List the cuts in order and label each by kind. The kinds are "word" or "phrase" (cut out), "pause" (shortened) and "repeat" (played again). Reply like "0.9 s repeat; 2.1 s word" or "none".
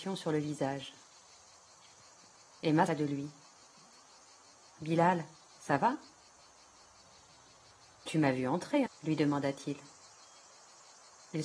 2.9 s word; 8.9 s word